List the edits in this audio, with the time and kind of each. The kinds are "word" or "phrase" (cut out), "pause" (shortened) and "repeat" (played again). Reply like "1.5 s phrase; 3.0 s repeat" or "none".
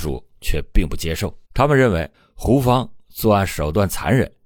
1.4 s pause; 2.1 s pause